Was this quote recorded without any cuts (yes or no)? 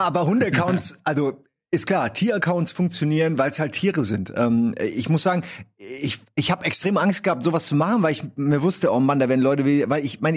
yes